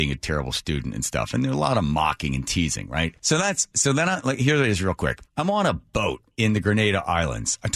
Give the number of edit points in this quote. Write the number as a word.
three